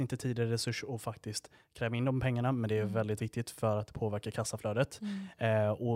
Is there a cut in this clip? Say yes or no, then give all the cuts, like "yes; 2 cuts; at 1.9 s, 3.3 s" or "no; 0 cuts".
yes; 1 cut; at 3.2 s